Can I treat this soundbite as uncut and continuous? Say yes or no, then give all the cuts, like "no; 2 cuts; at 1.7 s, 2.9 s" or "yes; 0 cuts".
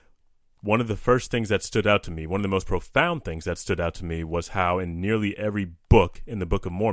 yes; 0 cuts